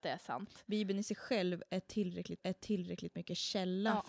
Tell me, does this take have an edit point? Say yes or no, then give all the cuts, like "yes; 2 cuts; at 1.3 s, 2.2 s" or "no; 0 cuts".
yes; 1 cut; at 2.4 s